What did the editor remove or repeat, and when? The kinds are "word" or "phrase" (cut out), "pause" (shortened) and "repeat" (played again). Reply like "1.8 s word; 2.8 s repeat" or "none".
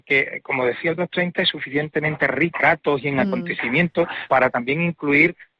1.0 s phrase; 2.6 s word; 4.3 s word